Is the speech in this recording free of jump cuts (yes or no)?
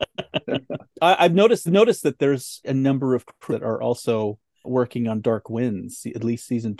no